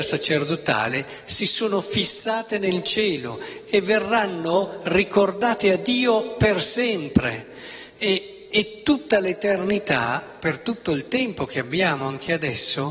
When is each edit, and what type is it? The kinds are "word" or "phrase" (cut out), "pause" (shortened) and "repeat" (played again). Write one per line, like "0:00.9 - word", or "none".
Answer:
none